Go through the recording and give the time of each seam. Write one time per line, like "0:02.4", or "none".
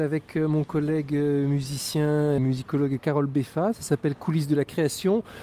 0:02.4
0:03.0